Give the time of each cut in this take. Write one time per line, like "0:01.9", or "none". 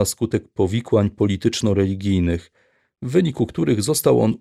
none